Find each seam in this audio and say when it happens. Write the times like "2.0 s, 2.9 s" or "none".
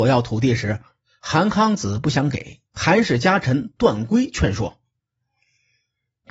2.7 s